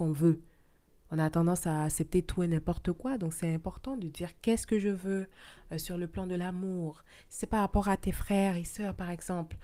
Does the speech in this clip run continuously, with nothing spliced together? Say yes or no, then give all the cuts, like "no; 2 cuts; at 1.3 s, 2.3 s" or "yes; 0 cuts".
yes; 0 cuts